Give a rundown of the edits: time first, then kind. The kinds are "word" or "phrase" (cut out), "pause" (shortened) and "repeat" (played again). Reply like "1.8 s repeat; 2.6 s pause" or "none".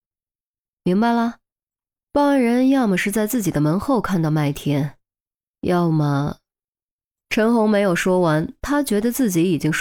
none